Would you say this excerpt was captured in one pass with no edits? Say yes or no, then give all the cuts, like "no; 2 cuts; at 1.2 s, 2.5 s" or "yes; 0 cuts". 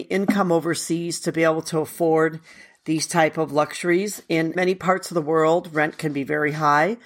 no; 1 cut; at 4.5 s